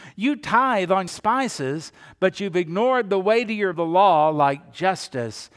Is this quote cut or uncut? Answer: cut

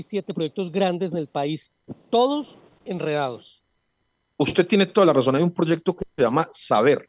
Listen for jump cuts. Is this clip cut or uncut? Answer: uncut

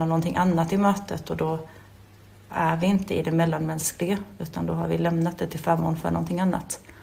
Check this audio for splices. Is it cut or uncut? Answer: uncut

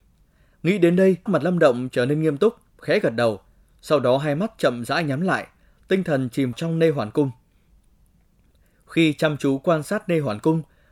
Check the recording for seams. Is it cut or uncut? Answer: cut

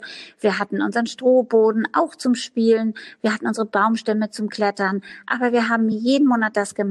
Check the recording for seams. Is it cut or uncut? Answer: uncut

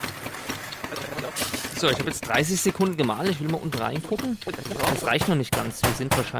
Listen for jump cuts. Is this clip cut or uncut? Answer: uncut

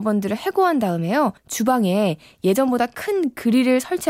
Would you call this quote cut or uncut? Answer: cut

